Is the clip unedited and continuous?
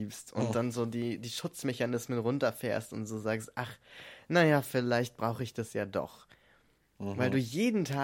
yes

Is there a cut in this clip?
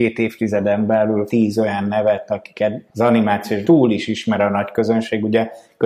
yes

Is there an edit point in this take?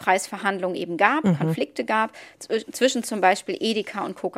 no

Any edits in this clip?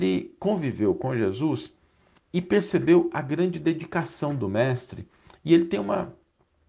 no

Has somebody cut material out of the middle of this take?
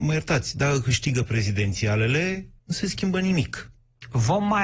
yes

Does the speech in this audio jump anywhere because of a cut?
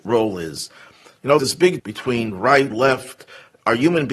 yes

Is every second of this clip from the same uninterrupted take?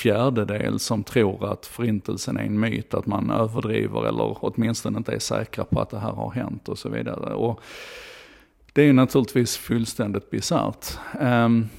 yes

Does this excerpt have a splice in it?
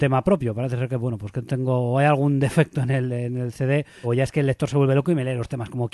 yes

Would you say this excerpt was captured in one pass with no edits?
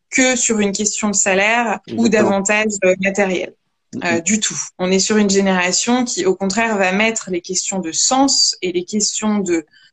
no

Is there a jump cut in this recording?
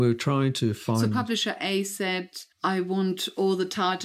yes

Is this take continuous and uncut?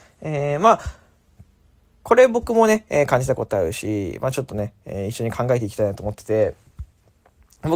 yes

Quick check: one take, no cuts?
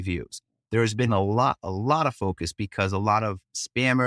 yes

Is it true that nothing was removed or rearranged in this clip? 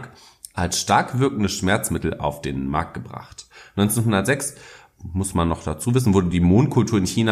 yes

